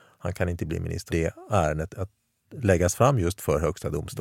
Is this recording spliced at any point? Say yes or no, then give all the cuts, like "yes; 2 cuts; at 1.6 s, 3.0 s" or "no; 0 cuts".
yes; 2 cuts; at 1.1 s, 1.9 s